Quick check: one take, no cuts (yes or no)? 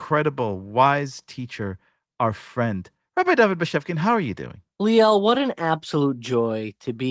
yes